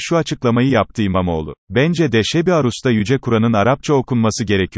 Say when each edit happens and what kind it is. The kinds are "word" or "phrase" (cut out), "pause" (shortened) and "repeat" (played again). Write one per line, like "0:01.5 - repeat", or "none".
0:01.6 - pause